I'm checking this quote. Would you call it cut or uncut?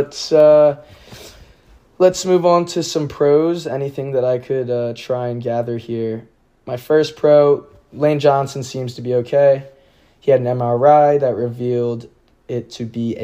uncut